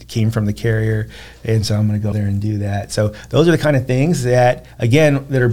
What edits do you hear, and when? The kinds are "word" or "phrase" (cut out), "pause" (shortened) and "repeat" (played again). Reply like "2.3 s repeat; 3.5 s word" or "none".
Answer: 2.1 s word